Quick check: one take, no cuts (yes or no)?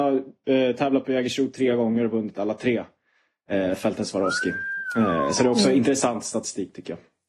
yes